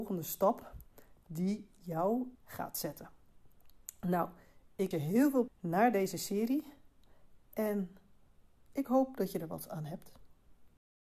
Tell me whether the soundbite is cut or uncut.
cut